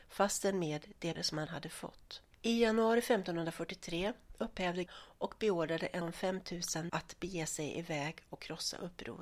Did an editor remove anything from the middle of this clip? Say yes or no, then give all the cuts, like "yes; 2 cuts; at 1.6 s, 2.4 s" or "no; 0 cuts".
yes; 6 cuts; at 1.1 s, 1.5 s, 2.3 s, 4.9 s, 6.0 s, 6.9 s